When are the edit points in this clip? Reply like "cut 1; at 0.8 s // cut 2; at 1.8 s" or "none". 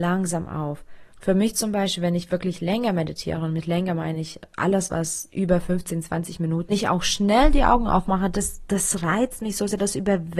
cut 1; at 1.1 s // cut 2; at 6.7 s